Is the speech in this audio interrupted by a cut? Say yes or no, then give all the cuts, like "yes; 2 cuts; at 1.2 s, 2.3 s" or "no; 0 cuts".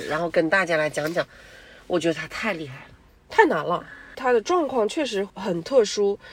no; 0 cuts